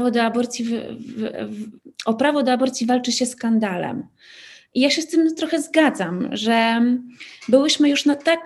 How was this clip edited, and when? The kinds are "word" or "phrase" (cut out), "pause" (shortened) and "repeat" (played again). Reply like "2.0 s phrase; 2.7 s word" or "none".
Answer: none